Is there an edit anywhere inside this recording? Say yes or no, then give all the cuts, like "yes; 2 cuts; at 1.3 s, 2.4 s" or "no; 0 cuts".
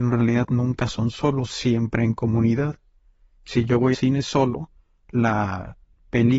yes; 2 cuts; at 1.5 s, 3.9 s